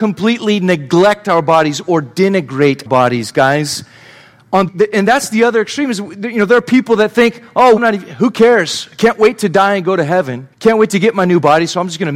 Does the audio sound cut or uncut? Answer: cut